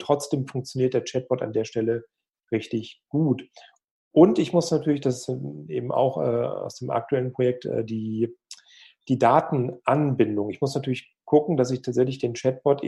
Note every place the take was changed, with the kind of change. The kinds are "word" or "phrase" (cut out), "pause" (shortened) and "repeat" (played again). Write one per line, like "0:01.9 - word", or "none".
none